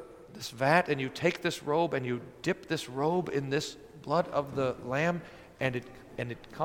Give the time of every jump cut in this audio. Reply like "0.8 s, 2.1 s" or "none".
none